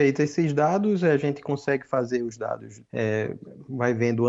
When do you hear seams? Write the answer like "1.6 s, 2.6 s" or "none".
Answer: 2.8 s

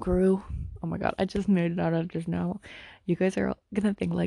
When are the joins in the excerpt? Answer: none

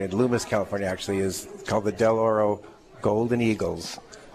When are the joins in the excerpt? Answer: none

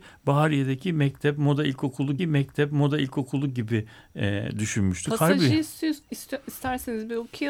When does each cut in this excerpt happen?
2.2 s

